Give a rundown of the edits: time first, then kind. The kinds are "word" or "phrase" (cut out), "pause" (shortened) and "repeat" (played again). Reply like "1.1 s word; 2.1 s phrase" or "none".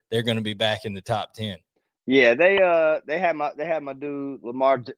1.8 s pause